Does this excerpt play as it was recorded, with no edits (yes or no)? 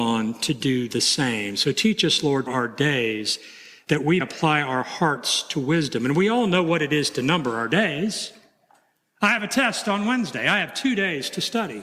no